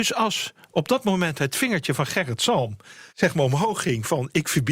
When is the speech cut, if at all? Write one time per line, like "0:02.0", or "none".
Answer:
0:03.1

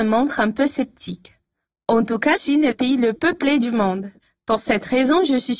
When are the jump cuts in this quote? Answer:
0:02.4
0:02.7
0:03.2

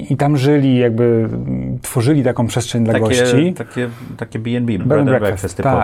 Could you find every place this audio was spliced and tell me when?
0:04.8

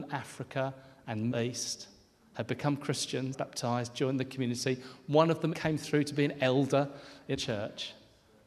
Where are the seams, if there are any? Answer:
0:01.3
0:03.3
0:05.5
0:07.3

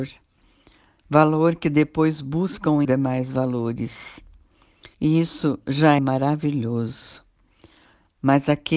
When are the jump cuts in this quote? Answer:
0:02.8
0:04.9
0:06.0

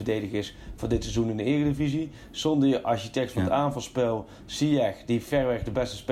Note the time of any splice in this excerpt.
none

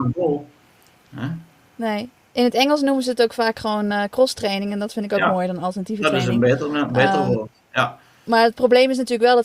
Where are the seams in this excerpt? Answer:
none

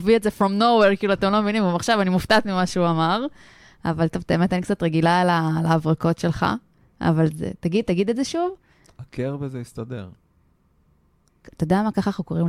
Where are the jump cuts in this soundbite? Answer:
none

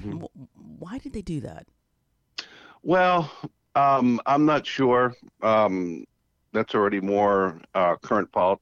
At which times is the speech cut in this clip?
none

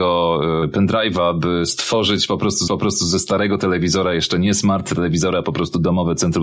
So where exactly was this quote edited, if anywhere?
0:02.7

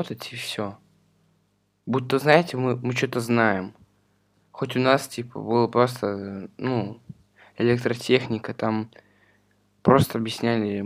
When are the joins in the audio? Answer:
none

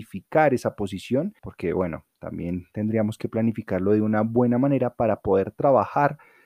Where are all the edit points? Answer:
0:01.4

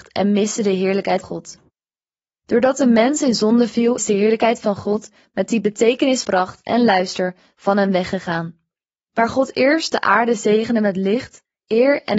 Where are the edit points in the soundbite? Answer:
0:01.2
0:04.0
0:06.2

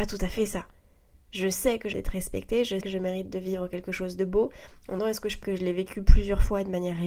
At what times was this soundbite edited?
0:01.9
0:02.8
0:05.0
0:05.4

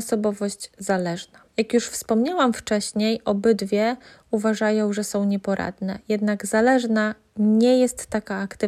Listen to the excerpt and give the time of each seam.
0:01.5

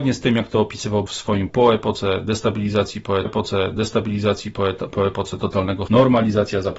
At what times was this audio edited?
0:01.1
0:01.5
0:03.2
0:05.9

